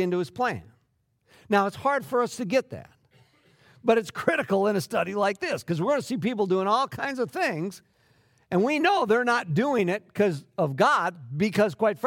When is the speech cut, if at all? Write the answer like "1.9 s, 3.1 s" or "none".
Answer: none

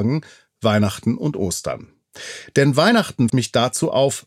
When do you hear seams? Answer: 3.3 s

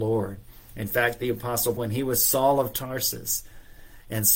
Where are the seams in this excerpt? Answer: 1.8 s

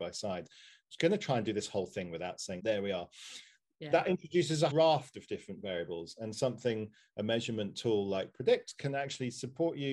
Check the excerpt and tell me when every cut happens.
2.6 s, 4.7 s

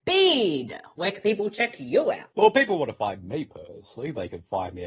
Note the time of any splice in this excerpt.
2.3 s

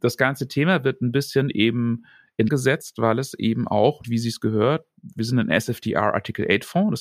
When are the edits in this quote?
2.5 s, 4.0 s

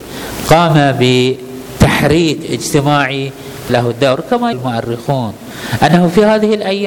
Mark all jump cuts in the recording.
3.7 s, 4.5 s

